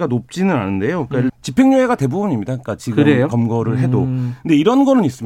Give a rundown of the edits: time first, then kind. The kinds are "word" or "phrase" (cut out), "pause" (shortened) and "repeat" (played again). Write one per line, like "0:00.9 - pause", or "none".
0:01.3 - phrase